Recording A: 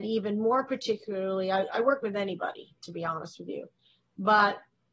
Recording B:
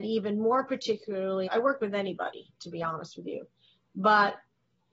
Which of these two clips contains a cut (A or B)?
B